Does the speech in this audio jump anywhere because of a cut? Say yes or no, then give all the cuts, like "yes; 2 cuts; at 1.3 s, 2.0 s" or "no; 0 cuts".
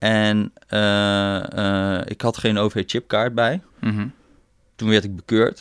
yes; 1 cut; at 3.7 s